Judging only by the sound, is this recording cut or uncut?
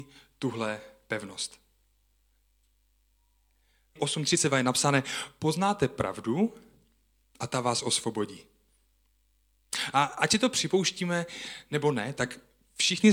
cut